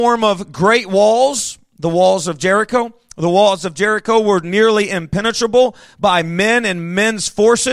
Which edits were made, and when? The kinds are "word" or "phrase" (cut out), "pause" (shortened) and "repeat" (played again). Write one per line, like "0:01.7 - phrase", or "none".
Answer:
none